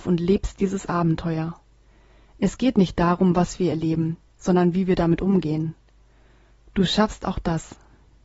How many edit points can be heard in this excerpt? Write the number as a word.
zero